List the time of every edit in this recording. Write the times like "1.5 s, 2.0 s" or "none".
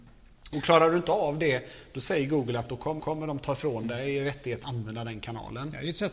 3.0 s, 4.6 s